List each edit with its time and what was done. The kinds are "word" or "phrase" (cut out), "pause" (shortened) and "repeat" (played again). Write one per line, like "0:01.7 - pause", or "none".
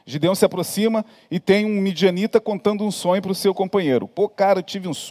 none